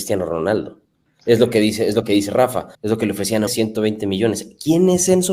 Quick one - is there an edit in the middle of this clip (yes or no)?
yes